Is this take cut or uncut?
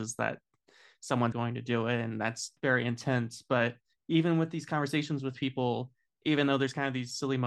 cut